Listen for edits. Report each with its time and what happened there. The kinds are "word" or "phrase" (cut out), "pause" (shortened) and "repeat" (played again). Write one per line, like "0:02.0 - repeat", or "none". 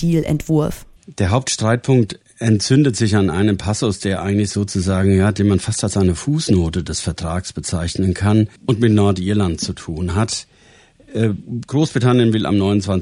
0:01.0 - pause
0:08.6 - pause